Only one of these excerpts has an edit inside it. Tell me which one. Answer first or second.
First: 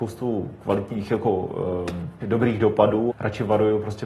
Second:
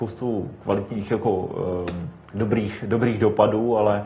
first